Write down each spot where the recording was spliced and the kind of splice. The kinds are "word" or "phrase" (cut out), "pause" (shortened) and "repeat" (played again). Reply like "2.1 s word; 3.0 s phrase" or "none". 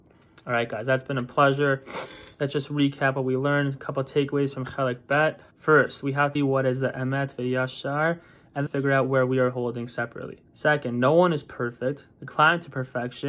5.5 s pause; 6.3 s phrase; 8.7 s word; 10.5 s pause